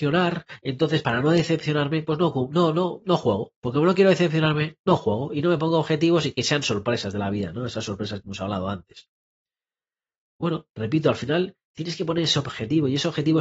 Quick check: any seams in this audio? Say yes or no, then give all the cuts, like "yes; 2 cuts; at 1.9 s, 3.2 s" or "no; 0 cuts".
yes; 2 cuts; at 3.6 s, 10.7 s